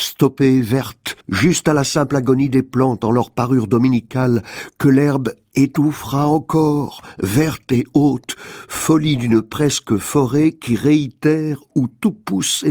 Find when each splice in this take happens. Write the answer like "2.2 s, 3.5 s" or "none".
1.2 s